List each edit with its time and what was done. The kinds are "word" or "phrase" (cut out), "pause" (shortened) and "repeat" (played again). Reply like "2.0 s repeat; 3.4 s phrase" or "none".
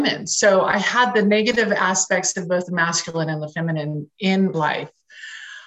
4.5 s word